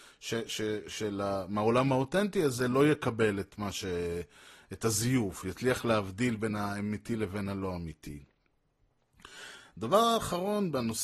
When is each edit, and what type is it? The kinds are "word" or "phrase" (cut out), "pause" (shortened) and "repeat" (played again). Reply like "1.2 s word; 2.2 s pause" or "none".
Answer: none